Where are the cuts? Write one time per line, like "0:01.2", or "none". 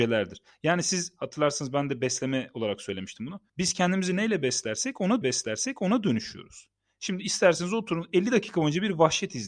0:03.5
0:05.2